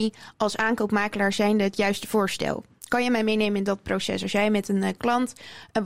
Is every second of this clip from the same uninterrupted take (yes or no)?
yes